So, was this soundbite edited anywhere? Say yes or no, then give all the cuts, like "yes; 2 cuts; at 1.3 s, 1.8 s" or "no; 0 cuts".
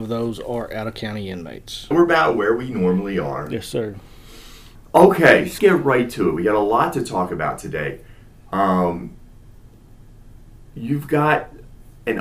yes; 3 cuts; at 1.9 s, 4.9 s, 5.6 s